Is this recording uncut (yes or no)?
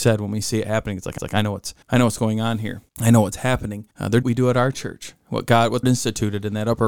no